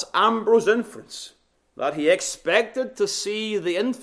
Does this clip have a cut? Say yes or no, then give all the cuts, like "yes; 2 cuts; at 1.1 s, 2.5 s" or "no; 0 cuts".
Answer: yes; 1 cut; at 1.5 s